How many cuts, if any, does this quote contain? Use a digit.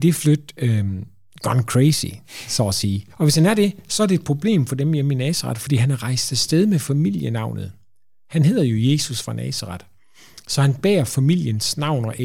1